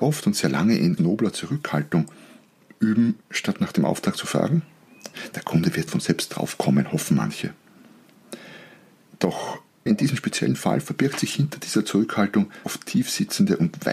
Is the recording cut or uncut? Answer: cut